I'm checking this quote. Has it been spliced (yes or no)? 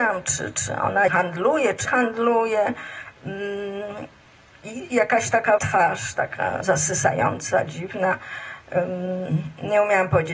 yes